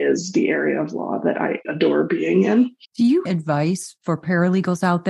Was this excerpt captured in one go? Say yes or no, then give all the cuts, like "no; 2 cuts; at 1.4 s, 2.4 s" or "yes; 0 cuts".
no; 3 cuts; at 1.6 s, 2.8 s, 3.3 s